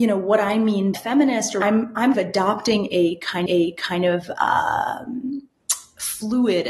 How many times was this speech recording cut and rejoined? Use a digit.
4